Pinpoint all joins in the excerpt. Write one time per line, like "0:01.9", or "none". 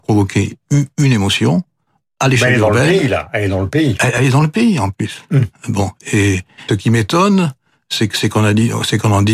0:06.7